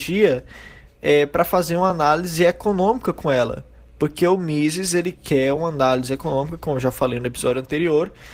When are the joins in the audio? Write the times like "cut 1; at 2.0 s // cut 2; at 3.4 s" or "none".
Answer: none